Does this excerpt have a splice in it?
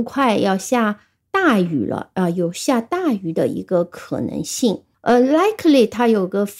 yes; 1 cut; at 4.9 s

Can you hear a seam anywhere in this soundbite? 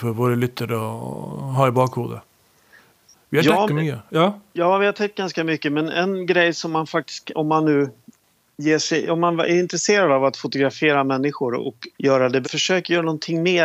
yes; 3 cuts; at 3.7 s, 11.9 s, 12.4 s

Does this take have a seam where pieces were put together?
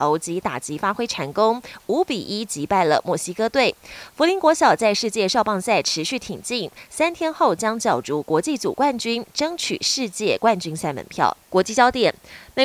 yes; 1 cut; at 11.4 s

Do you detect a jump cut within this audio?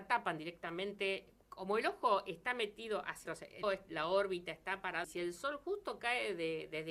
yes; 3 cuts; at 3.3 s, 3.6 s, 5.0 s

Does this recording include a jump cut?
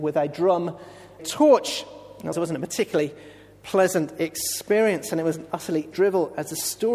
yes; 3 cuts; at 1.2 s, 2.3 s, 5.9 s

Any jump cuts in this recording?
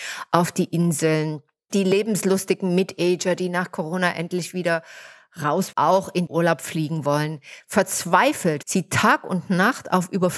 yes; 3 cuts; at 5.7 s, 6.3 s, 8.6 s

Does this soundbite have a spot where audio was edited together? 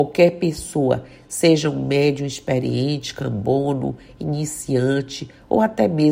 no; 0 cuts

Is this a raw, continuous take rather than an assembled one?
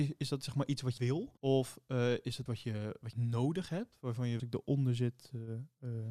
no; 5 cuts; at 1.0 s, 1.4 s, 2.5 s, 3.1 s, 4.4 s

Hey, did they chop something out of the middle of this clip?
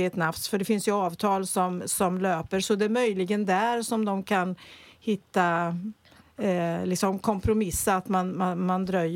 no; 0 cuts

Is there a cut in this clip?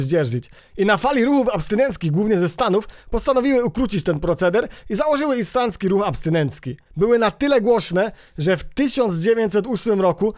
yes; 1 cut; at 6.9 s

